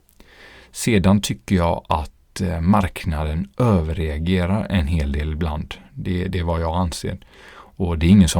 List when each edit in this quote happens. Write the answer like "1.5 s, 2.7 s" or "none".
none